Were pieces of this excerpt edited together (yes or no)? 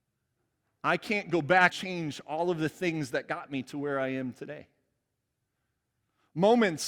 yes